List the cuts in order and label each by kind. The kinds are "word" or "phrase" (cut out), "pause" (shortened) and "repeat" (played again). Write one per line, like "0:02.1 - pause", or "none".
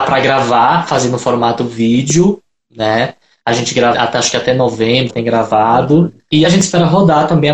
0:03.9 - word
0:05.1 - word
0:06.4 - word